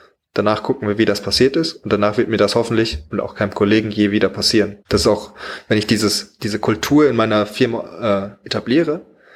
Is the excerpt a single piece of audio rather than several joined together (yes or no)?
no